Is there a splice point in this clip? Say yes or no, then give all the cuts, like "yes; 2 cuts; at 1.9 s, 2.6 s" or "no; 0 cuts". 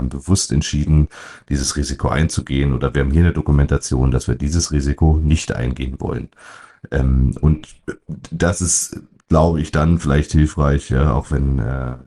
no; 0 cuts